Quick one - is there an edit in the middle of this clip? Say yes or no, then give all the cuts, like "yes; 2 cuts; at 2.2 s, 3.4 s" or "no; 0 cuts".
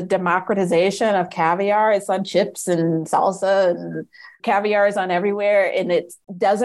no; 0 cuts